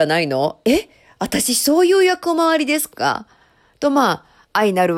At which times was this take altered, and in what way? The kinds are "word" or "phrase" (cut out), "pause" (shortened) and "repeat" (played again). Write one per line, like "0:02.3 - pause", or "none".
none

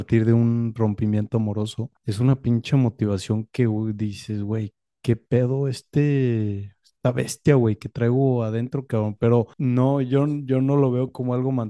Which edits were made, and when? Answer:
0:02.0 - pause
0:04.9 - pause
0:09.5 - pause

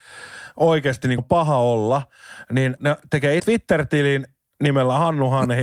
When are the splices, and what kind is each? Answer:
0:01.2 - word
0:02.8 - word
0:03.4 - word

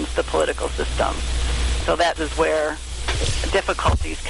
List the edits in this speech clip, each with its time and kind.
0:01.8 - word
0:02.2 - word

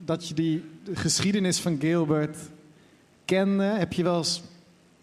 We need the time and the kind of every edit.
none

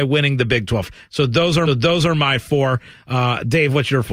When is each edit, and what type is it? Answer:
0:01.7 - repeat

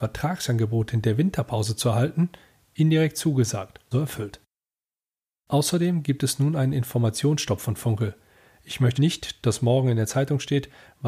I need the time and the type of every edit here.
0:03.9 - word
0:09.0 - word

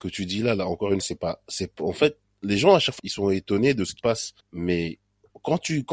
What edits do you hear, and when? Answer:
0:01.0 - word
0:03.0 - word
0:04.0 - word
0:04.4 - pause

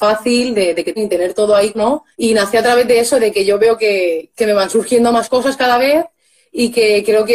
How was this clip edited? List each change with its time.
0:01.0 - word
0:01.7 - word
0:02.1 - pause
0:04.3 - word

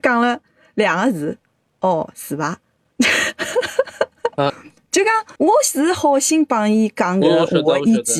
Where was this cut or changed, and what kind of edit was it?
0:04.5 - word
0:05.4 - pause

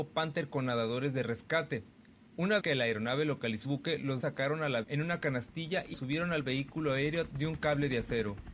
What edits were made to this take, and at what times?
0:02.6 - word
0:03.6 - word
0:04.2 - word
0:04.8 - word
0:05.9 - word
0:07.3 - word

